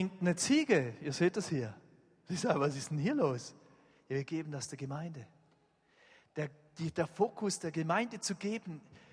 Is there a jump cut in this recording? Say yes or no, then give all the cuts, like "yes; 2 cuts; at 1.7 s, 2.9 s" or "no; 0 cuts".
no; 0 cuts